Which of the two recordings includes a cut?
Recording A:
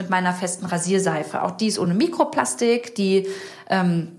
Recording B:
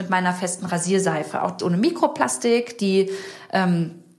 B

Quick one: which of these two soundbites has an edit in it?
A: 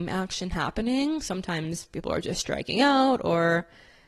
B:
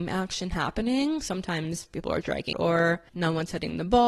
B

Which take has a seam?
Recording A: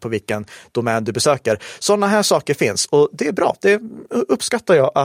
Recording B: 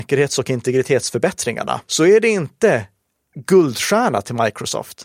B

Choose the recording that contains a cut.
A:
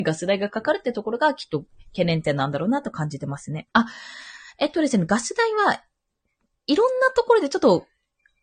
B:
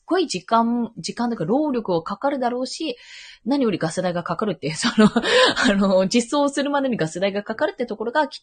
A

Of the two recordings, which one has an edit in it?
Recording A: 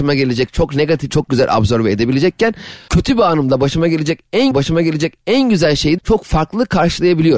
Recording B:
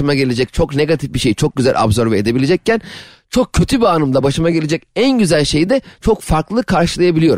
A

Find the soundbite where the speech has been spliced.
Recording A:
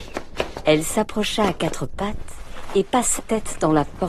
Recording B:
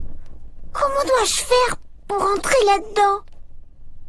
A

